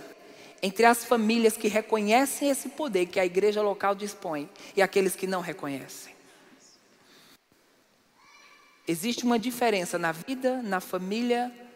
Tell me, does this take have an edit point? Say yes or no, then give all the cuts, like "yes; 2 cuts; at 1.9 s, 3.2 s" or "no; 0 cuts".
no; 0 cuts